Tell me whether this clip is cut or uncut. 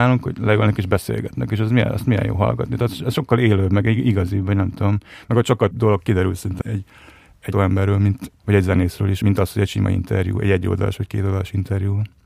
cut